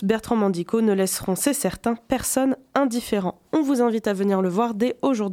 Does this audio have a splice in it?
no; 0 cuts

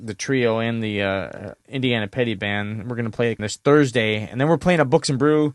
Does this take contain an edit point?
yes; 2 cuts; at 1.6 s, 3.4 s

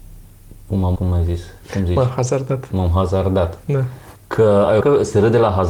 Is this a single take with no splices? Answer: no; 3 cuts; at 1.0 s, 4.1 s, 4.8 s

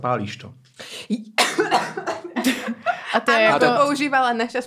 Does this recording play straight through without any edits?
yes; 0 cuts

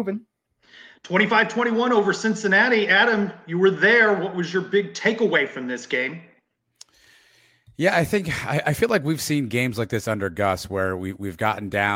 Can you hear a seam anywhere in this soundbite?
no; 0 cuts

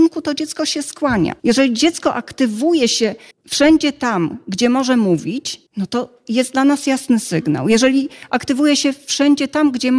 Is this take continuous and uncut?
no; 3 cuts; at 1.4 s, 3.3 s, 5.7 s

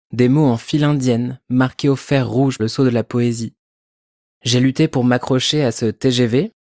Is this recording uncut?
no; 1 cut; at 2.6 s

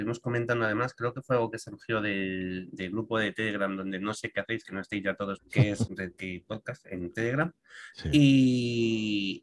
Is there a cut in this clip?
yes; 2 cuts; at 5.4 s, 5.9 s

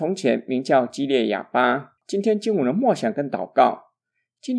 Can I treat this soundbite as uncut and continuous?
no; 1 cut; at 2.0 s

